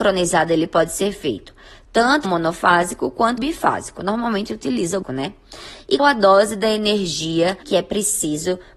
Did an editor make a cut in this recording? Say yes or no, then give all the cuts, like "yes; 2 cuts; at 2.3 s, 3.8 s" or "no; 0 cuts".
yes; 6 cuts; at 2.2 s, 3.4 s, 4.5 s, 5.0 s, 6.0 s, 7.6 s